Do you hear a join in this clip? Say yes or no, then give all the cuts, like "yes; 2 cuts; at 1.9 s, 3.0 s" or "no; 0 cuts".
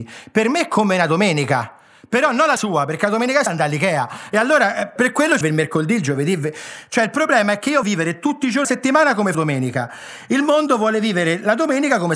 yes; 7 cuts; at 2.6 s, 3.5 s, 5.0 s, 5.4 s, 7.8 s, 8.6 s, 9.3 s